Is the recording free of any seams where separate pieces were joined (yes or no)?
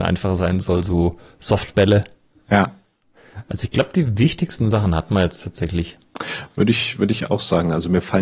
yes